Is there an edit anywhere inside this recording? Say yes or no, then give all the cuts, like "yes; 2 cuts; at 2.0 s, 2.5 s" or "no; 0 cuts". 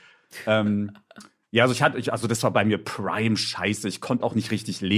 no; 0 cuts